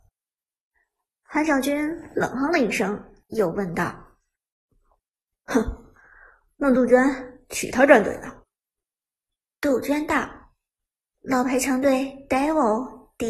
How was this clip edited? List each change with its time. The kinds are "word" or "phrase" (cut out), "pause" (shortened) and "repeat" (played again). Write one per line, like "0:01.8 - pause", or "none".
0:03.2 - pause
0:08.4 - pause
0:11.0 - pause